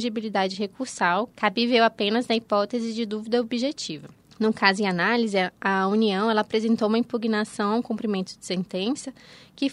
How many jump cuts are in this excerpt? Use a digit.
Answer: 0